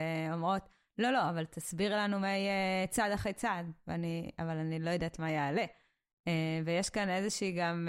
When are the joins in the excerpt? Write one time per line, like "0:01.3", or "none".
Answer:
none